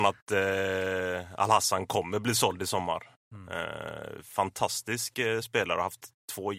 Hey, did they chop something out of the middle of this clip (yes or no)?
no